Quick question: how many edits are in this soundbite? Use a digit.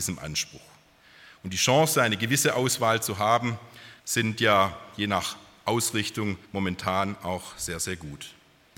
2